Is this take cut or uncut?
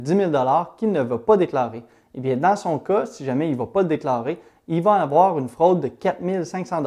uncut